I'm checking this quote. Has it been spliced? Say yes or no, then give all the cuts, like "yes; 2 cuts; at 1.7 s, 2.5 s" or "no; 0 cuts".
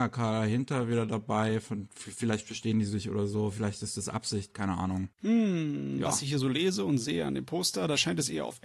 yes; 1 cut; at 5.1 s